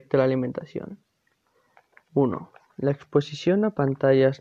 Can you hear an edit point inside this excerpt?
no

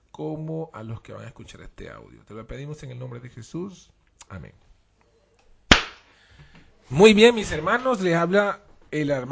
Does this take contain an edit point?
no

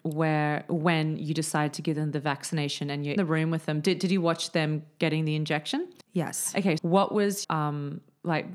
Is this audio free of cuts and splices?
no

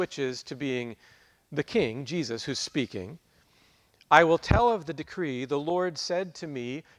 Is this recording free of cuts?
yes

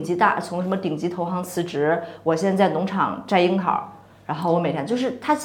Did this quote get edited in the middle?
no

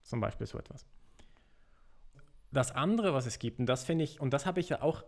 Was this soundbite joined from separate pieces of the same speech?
no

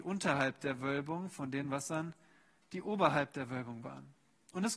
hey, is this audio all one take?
yes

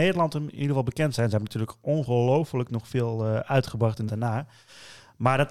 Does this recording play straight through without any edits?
no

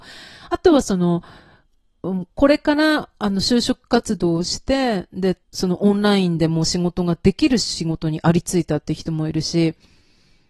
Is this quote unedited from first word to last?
no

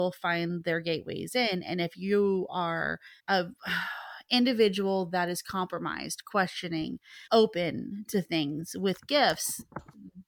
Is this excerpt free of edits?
no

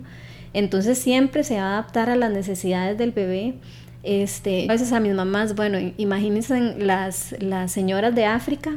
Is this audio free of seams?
no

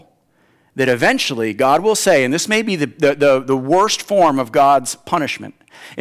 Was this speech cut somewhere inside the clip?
no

